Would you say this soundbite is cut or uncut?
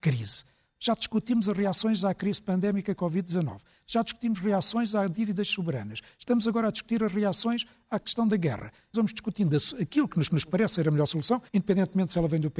cut